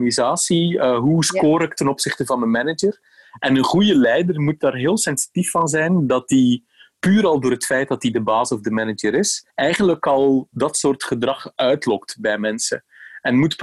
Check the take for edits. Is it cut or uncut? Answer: cut